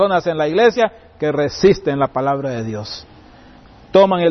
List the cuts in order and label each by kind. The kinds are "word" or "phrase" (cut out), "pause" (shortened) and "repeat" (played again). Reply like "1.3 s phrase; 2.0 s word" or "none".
none